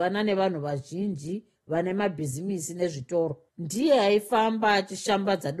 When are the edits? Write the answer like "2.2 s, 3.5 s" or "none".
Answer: 3.5 s